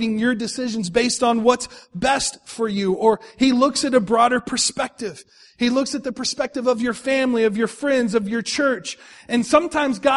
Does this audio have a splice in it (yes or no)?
no